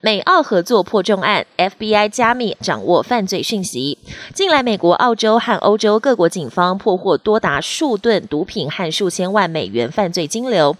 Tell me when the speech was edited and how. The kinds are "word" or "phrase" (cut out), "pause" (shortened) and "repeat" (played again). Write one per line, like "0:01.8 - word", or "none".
0:02.6 - word